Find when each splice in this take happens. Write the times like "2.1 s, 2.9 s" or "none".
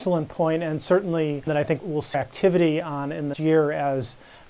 1.5 s, 1.8 s, 2.1 s, 3.3 s